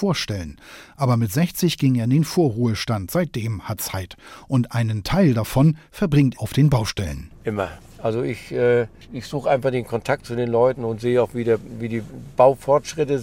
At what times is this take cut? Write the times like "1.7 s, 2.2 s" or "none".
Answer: 3.8 s, 6.3 s